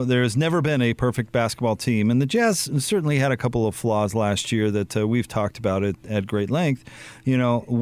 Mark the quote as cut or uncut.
uncut